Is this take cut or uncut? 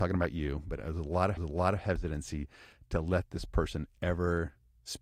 cut